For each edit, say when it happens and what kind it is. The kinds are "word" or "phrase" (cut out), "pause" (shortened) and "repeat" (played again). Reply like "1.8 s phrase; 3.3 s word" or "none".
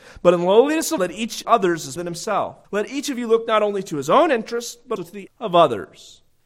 1.0 s word; 1.4 s word; 2.0 s word; 2.6 s pause; 5.0 s word; 5.3 s word